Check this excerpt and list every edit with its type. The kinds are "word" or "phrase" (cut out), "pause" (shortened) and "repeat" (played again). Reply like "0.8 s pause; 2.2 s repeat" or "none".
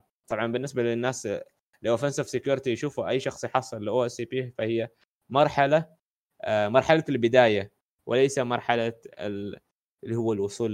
none